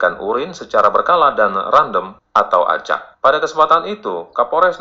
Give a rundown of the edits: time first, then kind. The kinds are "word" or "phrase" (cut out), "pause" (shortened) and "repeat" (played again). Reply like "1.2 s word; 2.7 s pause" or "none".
3.1 s pause

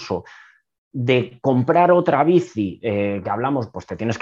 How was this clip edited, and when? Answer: none

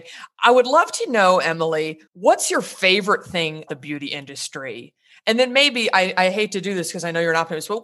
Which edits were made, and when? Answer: 2.1 s pause; 3.7 s word

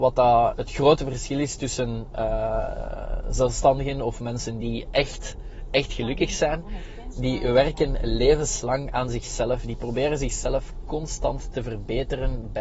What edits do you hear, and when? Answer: none

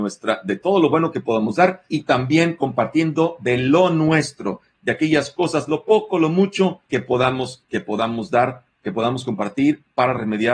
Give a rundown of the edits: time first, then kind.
1.9 s pause; 6.8 s pause

